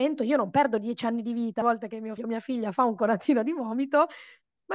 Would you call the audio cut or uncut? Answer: cut